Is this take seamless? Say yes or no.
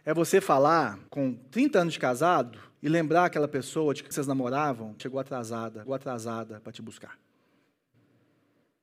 no